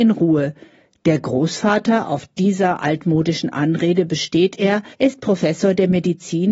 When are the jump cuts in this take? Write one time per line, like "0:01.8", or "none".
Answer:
0:04.9

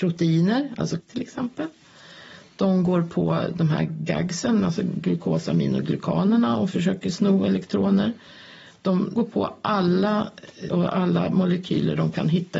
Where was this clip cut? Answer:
0:01.0
0:09.2
0:10.7

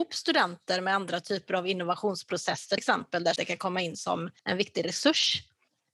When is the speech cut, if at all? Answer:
0:02.8
0:03.4
0:04.4

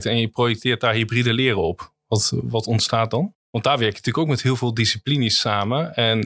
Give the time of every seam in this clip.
0:03.4

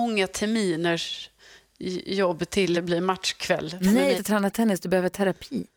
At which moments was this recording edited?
0:02.7
0:04.2

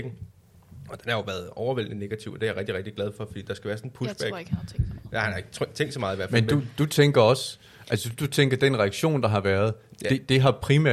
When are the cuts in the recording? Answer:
none

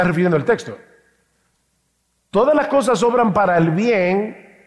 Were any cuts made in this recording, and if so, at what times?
none

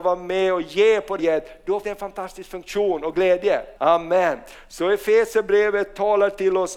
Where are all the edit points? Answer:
0:01.2
0:01.8
0:03.8

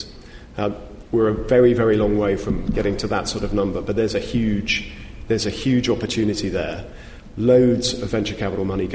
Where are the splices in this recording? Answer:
none

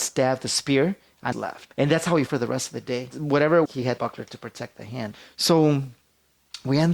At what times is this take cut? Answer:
0:01.3
0:02.3
0:03.7
0:04.0
0:04.7

